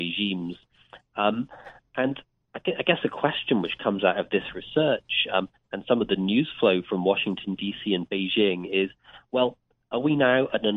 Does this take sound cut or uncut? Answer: uncut